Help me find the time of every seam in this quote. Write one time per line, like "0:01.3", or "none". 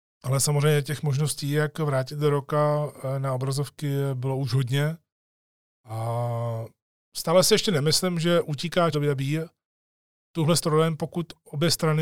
0:08.9